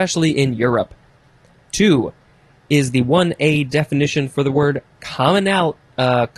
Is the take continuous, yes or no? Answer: yes